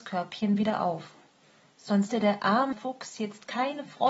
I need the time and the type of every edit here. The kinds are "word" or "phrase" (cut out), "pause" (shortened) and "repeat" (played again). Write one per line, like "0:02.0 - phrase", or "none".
0:02.1 - word
0:02.7 - word

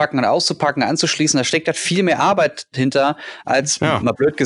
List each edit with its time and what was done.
none

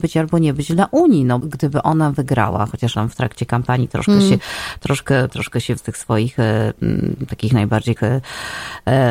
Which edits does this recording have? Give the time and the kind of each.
0:01.4 - word
0:02.9 - word
0:05.3 - word
0:05.8 - word
0:08.0 - word

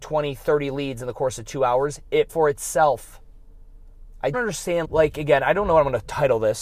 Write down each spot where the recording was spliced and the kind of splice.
0:02.3 - word
0:04.3 - word
0:04.8 - word

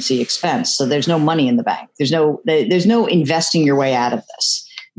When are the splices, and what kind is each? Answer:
none

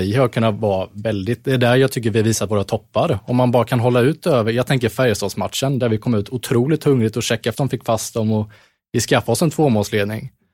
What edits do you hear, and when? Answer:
0:07.5 - word

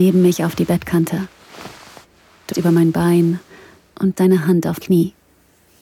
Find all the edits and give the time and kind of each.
0:02.5 - word
0:04.1 - word
0:04.8 - word

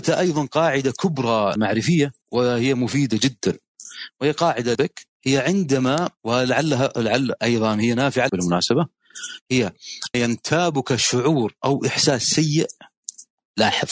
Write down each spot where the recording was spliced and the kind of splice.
0:01.6 - word
0:02.2 - pause
0:04.7 - word
0:05.2 - pause
0:06.2 - pause
0:08.3 - word
0:10.1 - word

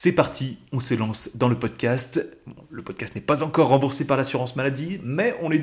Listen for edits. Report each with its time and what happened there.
none

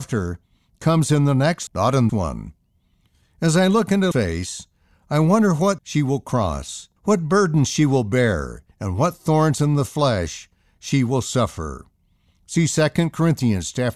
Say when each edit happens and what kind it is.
0:01.7 - word
0:02.1 - word
0:04.1 - word
0:05.8 - word
0:07.0 - pause
0:08.7 - pause

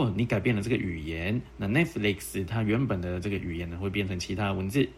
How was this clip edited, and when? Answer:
none

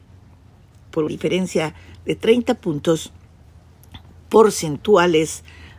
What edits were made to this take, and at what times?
0:01.1 - word

